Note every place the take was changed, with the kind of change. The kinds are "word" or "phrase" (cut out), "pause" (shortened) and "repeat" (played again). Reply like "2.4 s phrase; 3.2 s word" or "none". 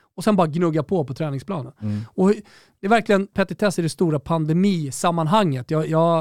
3.3 s word